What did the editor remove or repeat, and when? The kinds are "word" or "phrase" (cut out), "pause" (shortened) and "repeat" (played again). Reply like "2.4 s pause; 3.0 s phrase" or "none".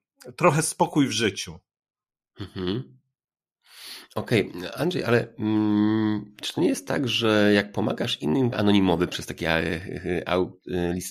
8.5 s phrase